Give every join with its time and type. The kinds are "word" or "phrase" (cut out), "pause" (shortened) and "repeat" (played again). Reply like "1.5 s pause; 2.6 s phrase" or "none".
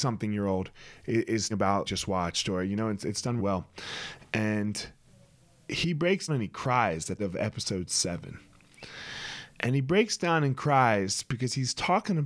1.5 s word; 1.9 s phrase; 3.4 s word; 6.3 s word; 7.2 s phrase; 9.5 s pause